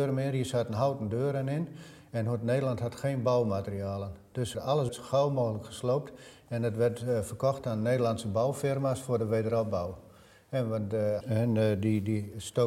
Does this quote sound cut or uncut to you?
cut